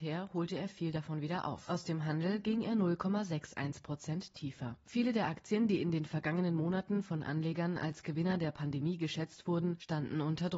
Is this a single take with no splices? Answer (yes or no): yes